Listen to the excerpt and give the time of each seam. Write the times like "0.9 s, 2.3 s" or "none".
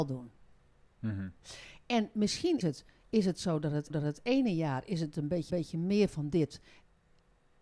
2.6 s, 3.9 s, 5.5 s